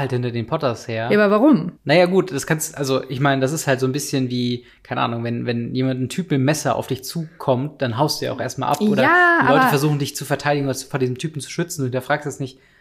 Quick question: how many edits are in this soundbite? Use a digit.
1